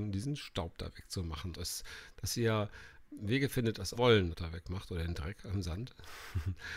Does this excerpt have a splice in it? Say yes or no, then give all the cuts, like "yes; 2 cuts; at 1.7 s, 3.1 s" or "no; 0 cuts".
yes; 4 cuts; at 1.5 s, 3.1 s, 3.9 s, 4.3 s